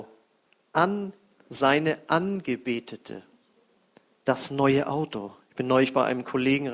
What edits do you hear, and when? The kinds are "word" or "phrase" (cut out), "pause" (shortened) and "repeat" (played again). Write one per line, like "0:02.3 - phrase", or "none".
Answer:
0:01.3 - word
0:03.7 - pause